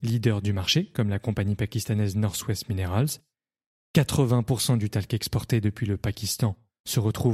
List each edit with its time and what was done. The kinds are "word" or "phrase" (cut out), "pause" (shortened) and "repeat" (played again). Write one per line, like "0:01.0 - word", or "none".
none

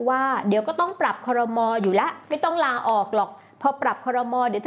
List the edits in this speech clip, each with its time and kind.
0:02.2 - pause

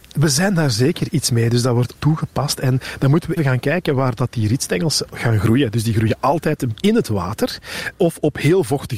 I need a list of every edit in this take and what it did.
0:01.9 - word
0:03.4 - word
0:06.7 - word
0:07.9 - word

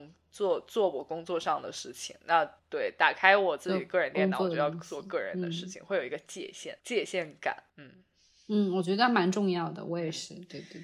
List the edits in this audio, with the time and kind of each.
0:02.6 - pause
0:06.8 - pause
0:07.7 - pause

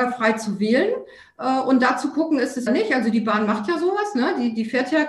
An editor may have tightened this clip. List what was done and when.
0:02.7 - phrase

